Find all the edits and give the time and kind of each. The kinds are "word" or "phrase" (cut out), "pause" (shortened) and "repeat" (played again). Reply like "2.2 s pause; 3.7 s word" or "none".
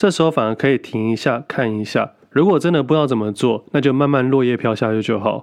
none